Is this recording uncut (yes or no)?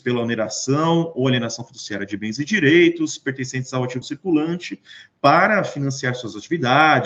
no